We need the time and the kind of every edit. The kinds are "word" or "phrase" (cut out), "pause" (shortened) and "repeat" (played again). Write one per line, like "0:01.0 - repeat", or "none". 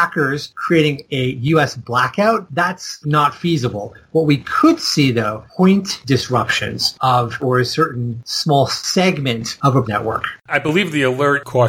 0:03.0 - word
0:05.5 - word
0:07.4 - phrase
0:09.8 - word
0:10.4 - pause